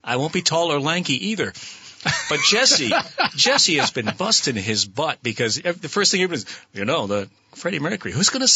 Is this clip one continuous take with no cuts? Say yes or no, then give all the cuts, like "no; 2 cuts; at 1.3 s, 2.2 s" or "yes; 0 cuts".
yes; 0 cuts